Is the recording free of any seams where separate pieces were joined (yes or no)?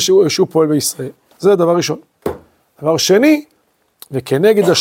yes